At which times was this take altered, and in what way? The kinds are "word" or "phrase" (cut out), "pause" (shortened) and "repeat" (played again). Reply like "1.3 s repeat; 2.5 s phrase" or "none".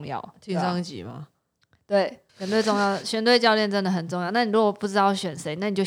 2.3 s pause